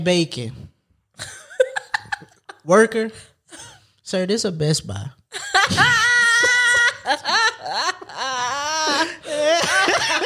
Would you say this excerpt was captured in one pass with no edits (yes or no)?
yes